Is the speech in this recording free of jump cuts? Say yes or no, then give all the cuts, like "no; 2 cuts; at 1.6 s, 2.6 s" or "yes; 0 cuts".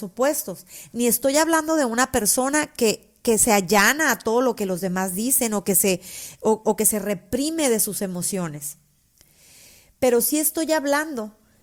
yes; 0 cuts